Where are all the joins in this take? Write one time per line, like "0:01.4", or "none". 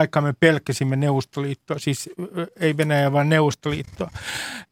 none

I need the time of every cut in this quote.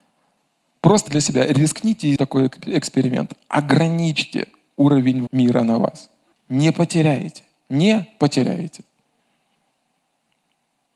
0:01.1
0:02.2
0:05.3
0:06.3

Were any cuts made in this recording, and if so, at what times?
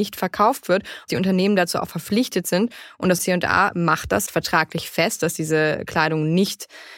0:01.1
0:03.2
0:04.3

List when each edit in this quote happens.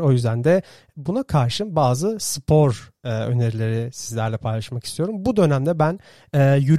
none

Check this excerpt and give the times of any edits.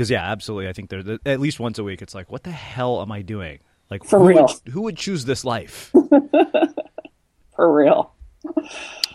none

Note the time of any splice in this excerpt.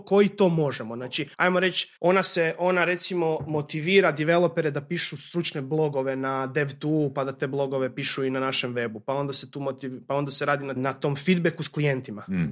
0:01.3
0:02.0
0:10.8

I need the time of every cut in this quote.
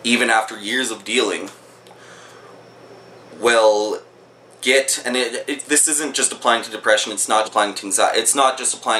0:07.4

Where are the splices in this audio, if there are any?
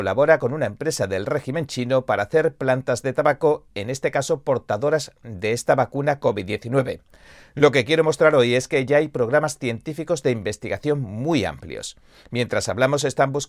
none

